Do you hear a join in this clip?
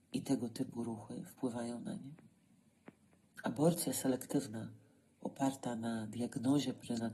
no; 0 cuts

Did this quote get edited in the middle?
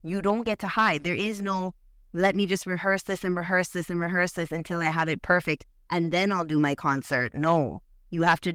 no; 0 cuts

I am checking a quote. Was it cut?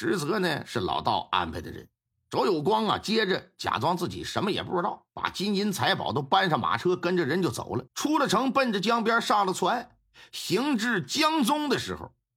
yes; 3 cuts; at 2.1 s, 5.1 s, 7.9 s

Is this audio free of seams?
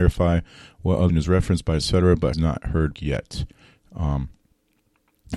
no; 3 cuts; at 1.1 s, 2.3 s, 2.9 s

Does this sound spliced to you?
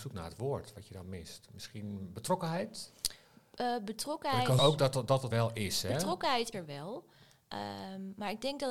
yes; 3 cuts; at 4.6 s, 5.3 s, 6.5 s

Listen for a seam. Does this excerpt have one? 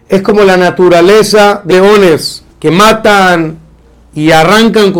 yes; 2 cuts; at 1.7 s, 2.5 s

